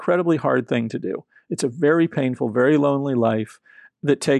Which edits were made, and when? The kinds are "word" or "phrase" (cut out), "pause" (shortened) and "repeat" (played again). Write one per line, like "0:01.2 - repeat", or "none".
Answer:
none